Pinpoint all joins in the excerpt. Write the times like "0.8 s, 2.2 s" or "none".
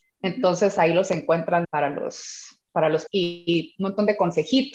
1.6 s, 2.7 s, 3.1 s